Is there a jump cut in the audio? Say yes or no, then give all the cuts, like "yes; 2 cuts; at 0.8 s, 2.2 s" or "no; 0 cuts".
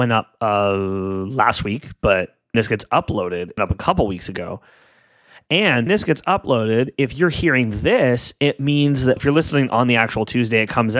yes; 4 cuts; at 2.5 s, 3.6 s, 5.9 s, 9.2 s